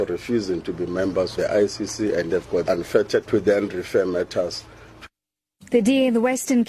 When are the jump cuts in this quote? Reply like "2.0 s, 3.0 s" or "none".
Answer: 1.3 s, 2.3 s, 2.7 s, 3.3 s